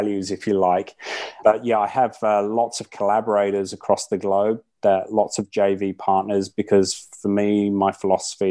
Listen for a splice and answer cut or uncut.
uncut